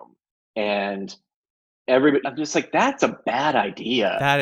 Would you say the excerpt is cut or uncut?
cut